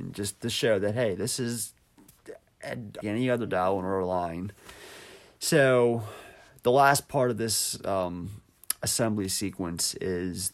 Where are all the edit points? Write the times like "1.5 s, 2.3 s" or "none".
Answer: 3.0 s